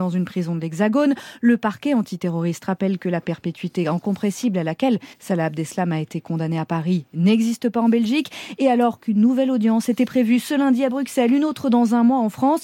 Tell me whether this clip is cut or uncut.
cut